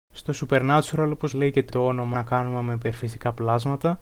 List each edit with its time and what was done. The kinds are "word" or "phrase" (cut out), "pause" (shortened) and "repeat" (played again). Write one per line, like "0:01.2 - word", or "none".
0:01.3 - word
0:01.7 - word
0:02.1 - word